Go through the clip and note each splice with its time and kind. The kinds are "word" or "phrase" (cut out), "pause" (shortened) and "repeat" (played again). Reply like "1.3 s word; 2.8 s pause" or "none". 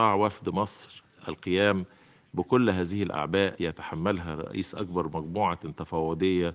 3.6 s word